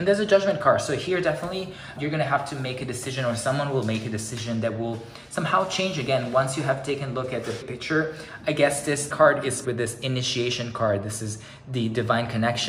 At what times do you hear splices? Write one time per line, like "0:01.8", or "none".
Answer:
0:02.0
0:07.6
0:09.1
0:09.6

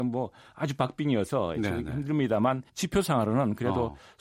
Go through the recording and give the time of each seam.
0:02.7

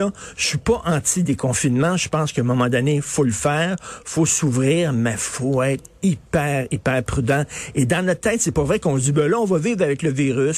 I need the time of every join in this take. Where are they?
none

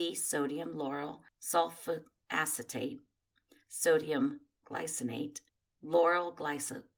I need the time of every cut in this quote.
0:04.6

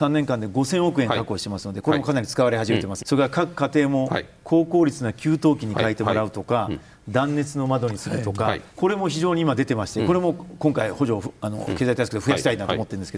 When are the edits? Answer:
0:03.0
0:08.7

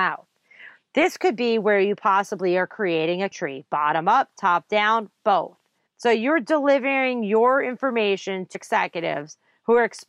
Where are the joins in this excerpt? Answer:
0:03.3
0:05.9
0:08.5

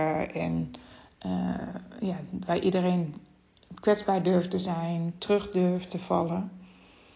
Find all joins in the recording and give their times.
none

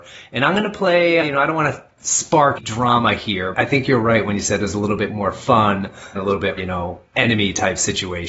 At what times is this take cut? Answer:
0:01.2
0:02.6
0:03.5
0:06.1
0:06.6

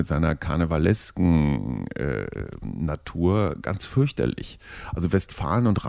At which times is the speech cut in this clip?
none

